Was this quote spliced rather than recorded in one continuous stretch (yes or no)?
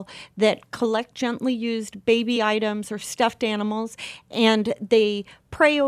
no